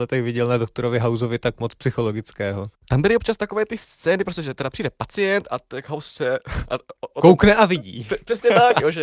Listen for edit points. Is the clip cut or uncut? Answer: uncut